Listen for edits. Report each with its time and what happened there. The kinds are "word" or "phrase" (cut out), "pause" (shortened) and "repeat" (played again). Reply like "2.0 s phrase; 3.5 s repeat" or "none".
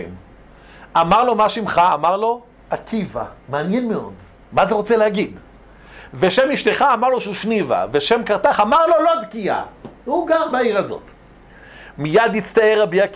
3.4 s pause; 10.5 s word